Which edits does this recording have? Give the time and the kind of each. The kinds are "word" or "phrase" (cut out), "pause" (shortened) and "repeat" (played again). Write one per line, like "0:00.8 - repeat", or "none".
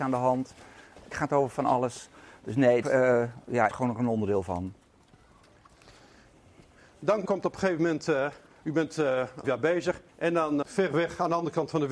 0:01.1 - word
0:02.8 - phrase
0:03.7 - word
0:07.2 - word
0:08.5 - pause
0:09.4 - word
0:10.1 - pause
0:10.6 - phrase